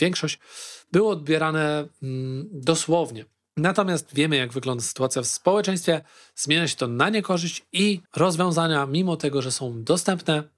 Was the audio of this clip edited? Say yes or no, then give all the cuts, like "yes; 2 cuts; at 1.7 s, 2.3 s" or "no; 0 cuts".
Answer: yes; 1 cut; at 8.1 s